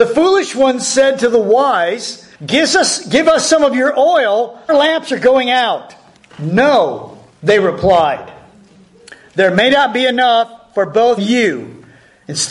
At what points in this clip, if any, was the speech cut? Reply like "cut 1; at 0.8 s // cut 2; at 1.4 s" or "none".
cut 1; at 2.3 s // cut 2; at 4.7 s // cut 3; at 6.2 s // cut 4; at 11.2 s